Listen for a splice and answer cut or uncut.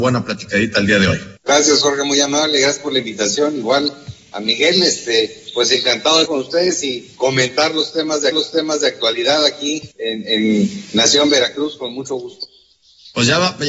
cut